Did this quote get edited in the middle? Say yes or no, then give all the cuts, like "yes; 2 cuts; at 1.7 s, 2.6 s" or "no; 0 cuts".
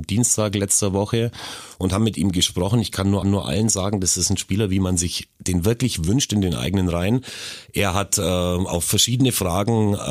yes; 1 cut; at 3.2 s